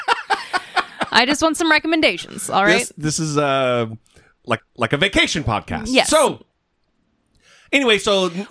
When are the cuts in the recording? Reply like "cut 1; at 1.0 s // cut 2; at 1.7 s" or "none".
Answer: cut 1; at 4.6 s